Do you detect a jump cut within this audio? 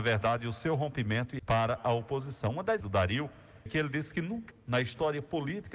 yes; 4 cuts; at 1.4 s, 2.8 s, 3.7 s, 4.5 s

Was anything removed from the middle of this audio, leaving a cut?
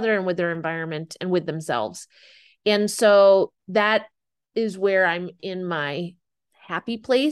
no; 0 cuts

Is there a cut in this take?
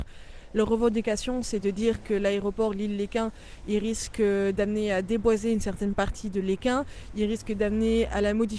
no; 0 cuts

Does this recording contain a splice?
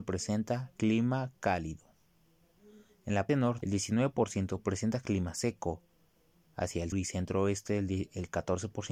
yes; 3 cuts; at 3.3 s, 3.6 s, 6.9 s

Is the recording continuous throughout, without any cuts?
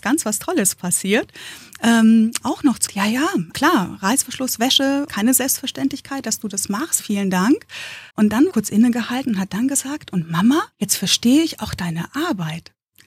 no; 8 cuts; at 2.4 s, 2.9 s, 3.5 s, 5.1 s, 7.0 s, 8.1 s, 8.5 s, 10.7 s

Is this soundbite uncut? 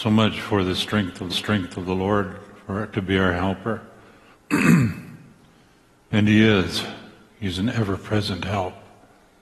no; 1 cut; at 1.3 s

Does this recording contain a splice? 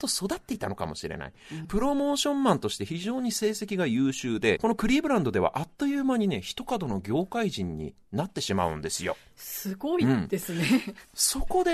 yes; 2 cuts; at 1.6 s, 4.6 s

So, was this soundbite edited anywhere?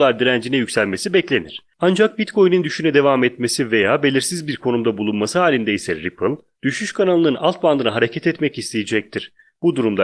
no; 0 cuts

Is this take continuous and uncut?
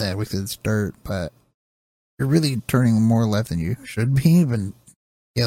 yes; 0 cuts

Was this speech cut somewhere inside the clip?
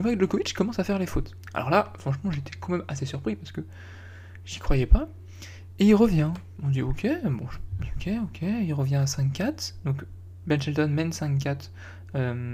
no; 0 cuts

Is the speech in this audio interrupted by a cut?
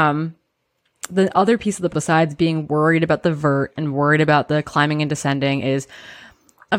yes; 1 cut; at 1.9 s

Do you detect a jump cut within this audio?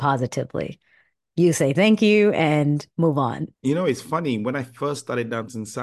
yes; 2 cuts; at 2.9 s, 3.5 s

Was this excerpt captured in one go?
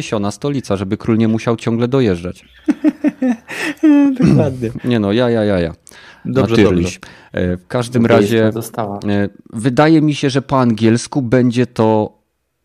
yes; 0 cuts

